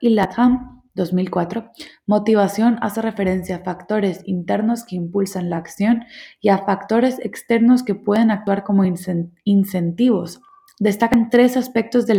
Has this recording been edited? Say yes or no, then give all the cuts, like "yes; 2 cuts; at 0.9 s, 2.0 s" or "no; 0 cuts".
no; 0 cuts